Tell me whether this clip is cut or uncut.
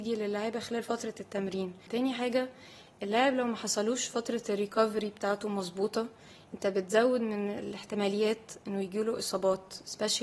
uncut